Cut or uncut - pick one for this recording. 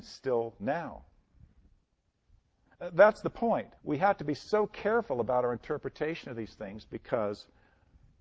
cut